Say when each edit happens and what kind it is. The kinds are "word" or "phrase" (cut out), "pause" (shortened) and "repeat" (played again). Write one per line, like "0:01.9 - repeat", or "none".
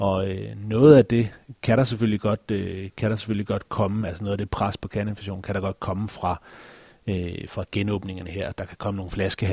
none